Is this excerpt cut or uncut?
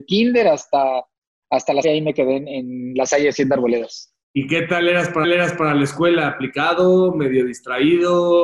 cut